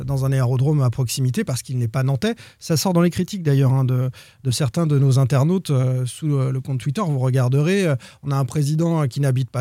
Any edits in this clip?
no; 0 cuts

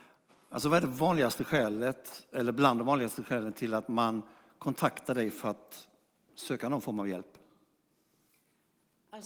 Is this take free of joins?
yes; 0 cuts

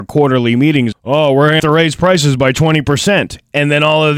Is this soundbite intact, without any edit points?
no; 2 cuts; at 0.9 s, 1.6 s

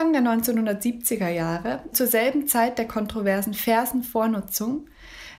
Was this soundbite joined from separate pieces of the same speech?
yes; 1 cut; at 1.9 s

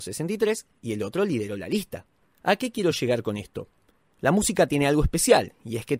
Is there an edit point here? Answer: no; 0 cuts

